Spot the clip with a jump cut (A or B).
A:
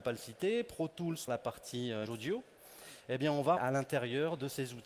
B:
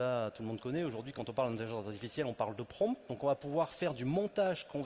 A